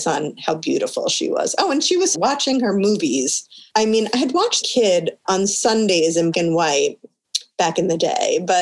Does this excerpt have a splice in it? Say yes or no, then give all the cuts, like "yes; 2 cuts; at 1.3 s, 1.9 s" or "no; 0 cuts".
yes; 3 cuts; at 2.1 s, 4.6 s, 6.3 s